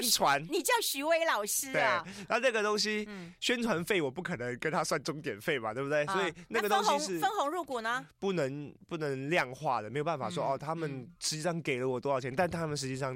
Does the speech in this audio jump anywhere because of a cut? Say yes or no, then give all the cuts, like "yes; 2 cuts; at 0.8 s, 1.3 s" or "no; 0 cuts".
yes; 1 cut; at 11.2 s